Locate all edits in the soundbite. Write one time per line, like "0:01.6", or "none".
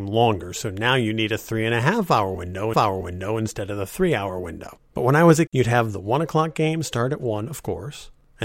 0:02.7
0:04.9
0:05.5

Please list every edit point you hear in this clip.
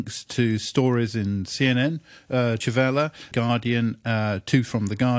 0:02.6
0:03.3

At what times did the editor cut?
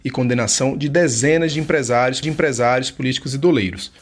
0:02.2

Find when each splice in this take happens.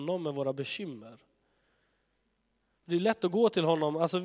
none

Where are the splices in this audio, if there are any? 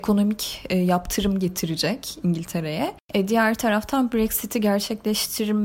none

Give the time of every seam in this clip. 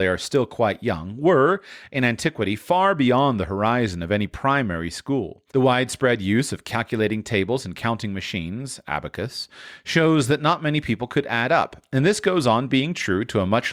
0:05.5

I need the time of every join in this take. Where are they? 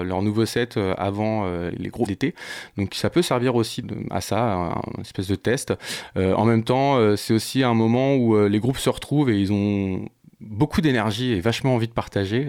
0:01.7
0:02.1
0:03.8
0:04.7

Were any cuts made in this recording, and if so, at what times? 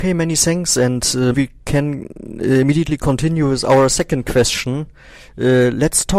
0:01.3

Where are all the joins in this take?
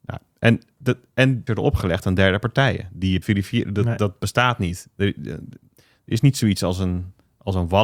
0:01.5
0:03.2

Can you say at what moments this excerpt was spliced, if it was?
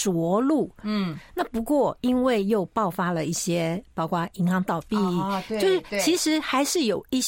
none

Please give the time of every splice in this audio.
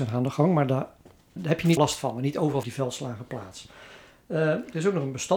0:01.4
0:01.8
0:02.6

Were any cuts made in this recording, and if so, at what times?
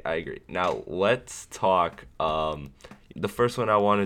0:03.1

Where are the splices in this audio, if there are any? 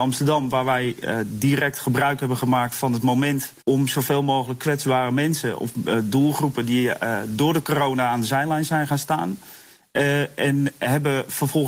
0:03.6

